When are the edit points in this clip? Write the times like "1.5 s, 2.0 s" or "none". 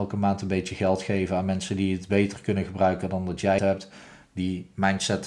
3.6 s